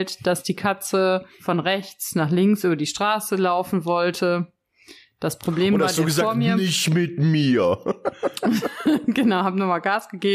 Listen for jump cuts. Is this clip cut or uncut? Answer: cut